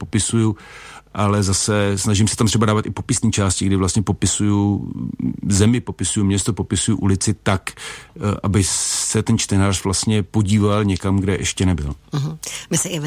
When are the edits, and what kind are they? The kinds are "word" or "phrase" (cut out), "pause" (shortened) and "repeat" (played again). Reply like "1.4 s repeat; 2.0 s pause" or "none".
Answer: none